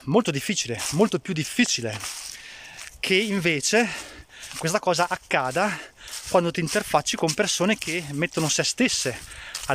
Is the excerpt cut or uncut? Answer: uncut